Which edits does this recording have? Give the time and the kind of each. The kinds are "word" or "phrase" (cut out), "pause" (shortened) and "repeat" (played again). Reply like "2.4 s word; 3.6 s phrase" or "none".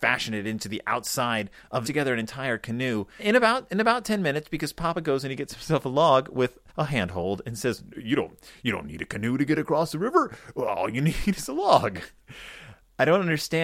1.8 s phrase; 3.2 s word; 6.7 s pause